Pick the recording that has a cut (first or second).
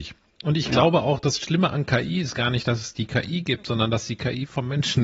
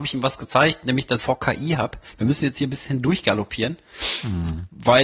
second